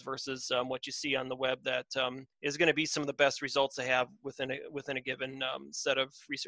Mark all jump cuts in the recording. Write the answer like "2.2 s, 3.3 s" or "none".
2.3 s